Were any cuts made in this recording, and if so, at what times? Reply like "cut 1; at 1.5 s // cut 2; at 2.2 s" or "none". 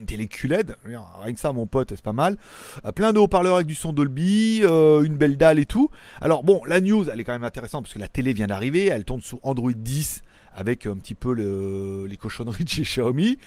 none